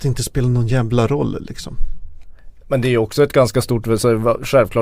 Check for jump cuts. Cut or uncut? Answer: uncut